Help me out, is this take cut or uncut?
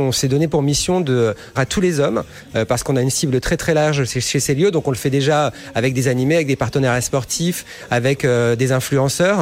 cut